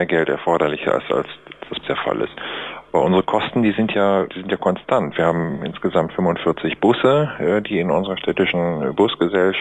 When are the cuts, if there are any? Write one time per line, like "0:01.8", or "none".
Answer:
0:01.8